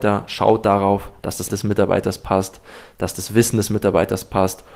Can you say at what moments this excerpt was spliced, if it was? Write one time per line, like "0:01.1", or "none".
0:01.5